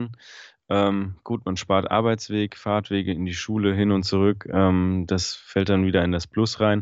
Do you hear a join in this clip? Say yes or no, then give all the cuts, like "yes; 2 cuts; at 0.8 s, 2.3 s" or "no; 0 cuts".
no; 0 cuts